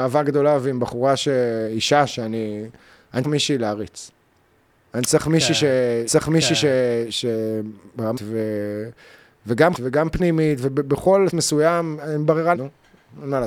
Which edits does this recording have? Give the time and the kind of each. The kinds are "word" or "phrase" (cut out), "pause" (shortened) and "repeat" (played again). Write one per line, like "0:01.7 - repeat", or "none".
0:03.2 - word
0:06.1 - repeat
0:08.2 - word
0:09.7 - word
0:11.3 - word
0:12.5 - word